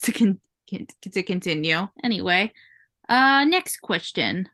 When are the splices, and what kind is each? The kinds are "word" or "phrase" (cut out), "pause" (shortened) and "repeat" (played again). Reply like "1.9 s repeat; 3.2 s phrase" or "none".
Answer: 1.9 s pause